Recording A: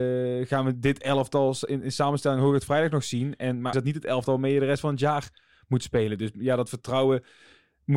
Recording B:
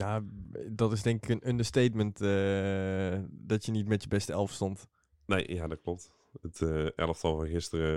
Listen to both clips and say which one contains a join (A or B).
A